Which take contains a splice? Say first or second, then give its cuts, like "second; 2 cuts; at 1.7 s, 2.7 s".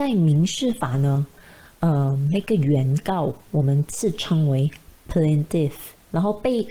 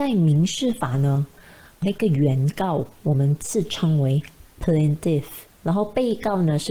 second; 1 cut; at 1.8 s